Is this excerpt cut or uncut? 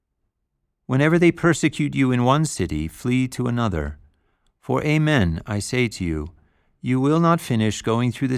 uncut